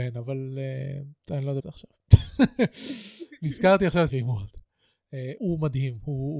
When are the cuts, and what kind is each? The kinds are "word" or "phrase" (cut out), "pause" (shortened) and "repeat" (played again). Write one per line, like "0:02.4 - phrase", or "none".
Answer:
0:01.2 - pause
0:01.6 - phrase
0:04.1 - word
0:05.4 - word